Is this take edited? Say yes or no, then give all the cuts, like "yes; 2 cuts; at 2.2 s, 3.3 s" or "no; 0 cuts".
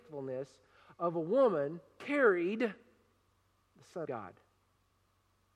yes; 2 cuts; at 2.0 s, 4.0 s